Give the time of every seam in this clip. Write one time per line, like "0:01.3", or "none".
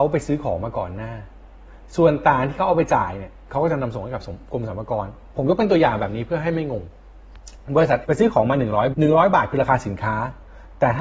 0:08.0
0:08.9